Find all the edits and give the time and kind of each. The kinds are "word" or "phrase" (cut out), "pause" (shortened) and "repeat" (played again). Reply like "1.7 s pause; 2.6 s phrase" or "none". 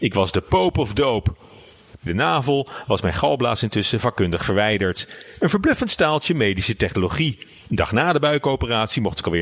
2.1 s phrase; 7.6 s pause